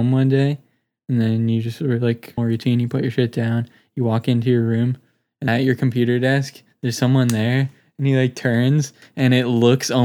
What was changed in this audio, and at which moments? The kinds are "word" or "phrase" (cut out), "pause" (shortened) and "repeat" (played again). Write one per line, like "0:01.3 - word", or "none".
0:02.4 - phrase
0:05.5 - word